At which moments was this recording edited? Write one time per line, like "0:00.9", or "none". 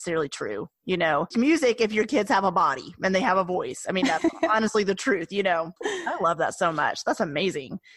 0:01.3
0:05.8